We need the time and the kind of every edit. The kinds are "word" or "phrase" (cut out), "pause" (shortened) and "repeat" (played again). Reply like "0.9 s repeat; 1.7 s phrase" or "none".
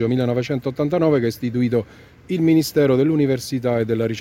none

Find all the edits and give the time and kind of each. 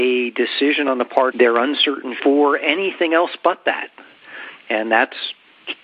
1.3 s phrase; 2.2 s word

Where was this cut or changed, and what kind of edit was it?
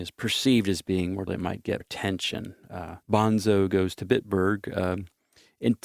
1.3 s word; 1.8 s word; 3.0 s pause

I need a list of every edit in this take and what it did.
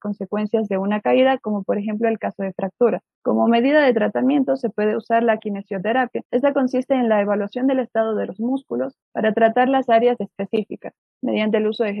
10.2 s word

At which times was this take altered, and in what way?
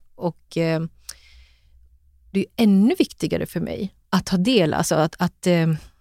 2.3 s phrase; 4.0 s pause

